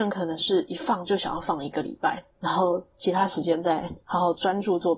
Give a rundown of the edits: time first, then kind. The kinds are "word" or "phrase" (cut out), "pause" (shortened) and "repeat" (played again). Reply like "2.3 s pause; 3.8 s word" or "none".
2.3 s pause; 2.9 s pause; 4.0 s pause